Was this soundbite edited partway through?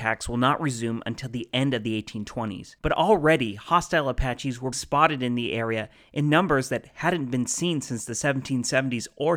yes; 2 cuts; at 2.8 s, 4.7 s

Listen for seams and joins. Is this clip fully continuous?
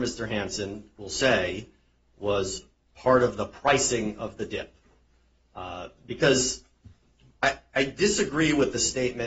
yes; 0 cuts

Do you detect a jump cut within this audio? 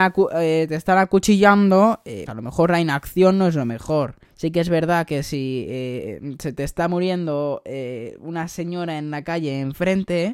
yes; 2 cuts; at 2.3 s, 4.2 s

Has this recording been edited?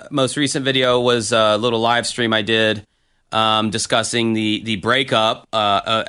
no; 0 cuts

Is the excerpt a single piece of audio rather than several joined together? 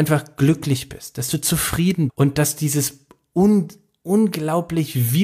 no; 1 cut; at 2.1 s

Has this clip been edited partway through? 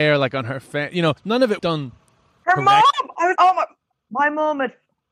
yes; 3 cuts; at 1.2 s, 1.6 s, 3.4 s

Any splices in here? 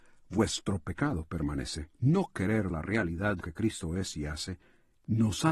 yes; 3 cuts; at 1.9 s, 2.7 s, 3.4 s

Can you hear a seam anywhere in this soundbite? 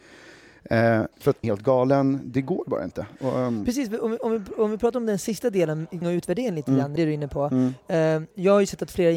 yes; 4 cuts; at 1.1 s, 1.4 s, 6.0 s, 7.0 s

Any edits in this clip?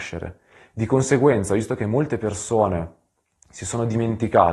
no; 0 cuts

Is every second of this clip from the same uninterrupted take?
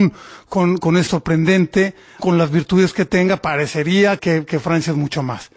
no; 3 cuts; at 1.1 s, 2.2 s, 4.2 s

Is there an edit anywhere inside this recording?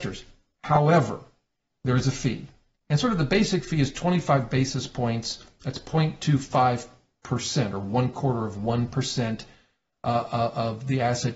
no; 0 cuts

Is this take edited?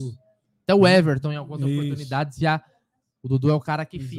no; 0 cuts

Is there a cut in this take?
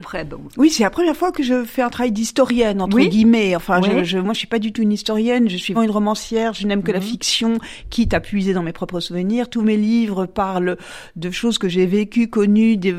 yes; 1 cut; at 5.7 s

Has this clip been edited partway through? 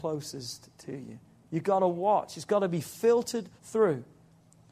yes; 1 cut; at 3.6 s

